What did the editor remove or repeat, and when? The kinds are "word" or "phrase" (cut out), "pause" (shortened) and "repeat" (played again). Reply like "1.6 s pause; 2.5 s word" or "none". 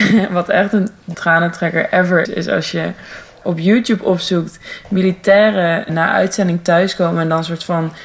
1.1 s word; 2.3 s word; 3.4 s word; 5.9 s word